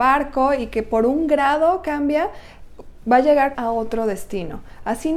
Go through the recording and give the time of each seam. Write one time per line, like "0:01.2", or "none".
0:03.5